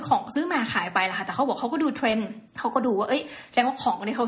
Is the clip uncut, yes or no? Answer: no